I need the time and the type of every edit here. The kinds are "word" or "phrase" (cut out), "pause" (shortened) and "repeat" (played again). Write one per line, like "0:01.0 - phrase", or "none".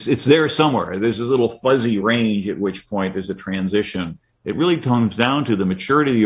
none